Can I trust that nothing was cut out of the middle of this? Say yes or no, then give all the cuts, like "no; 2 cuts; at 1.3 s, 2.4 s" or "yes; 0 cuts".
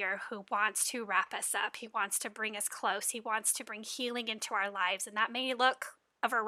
yes; 0 cuts